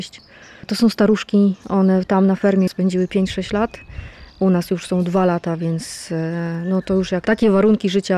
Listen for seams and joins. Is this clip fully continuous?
no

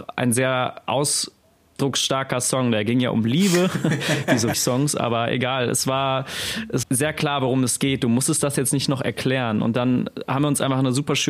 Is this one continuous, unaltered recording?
no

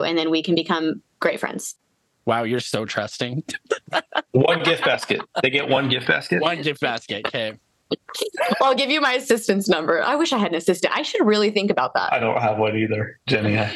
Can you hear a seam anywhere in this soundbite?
no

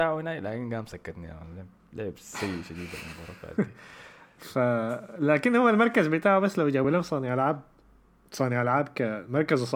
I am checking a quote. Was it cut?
no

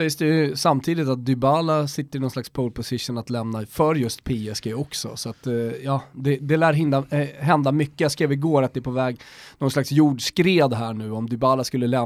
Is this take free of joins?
yes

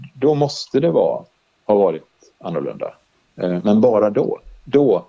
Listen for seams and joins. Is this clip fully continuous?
yes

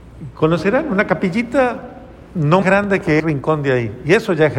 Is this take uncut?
no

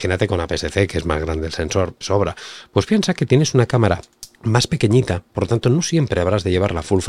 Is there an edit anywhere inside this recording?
yes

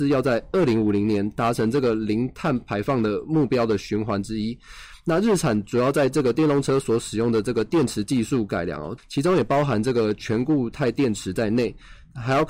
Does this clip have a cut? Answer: yes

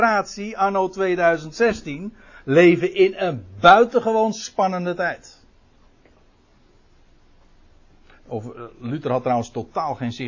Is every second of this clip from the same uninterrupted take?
yes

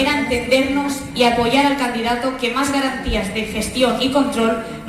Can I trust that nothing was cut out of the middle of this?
yes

